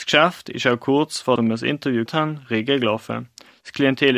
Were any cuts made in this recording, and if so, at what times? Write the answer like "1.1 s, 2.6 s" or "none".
1.4 s, 2.1 s